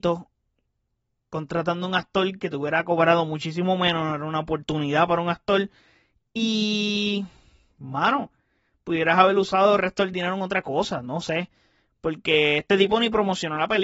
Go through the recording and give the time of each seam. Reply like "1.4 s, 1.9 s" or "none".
none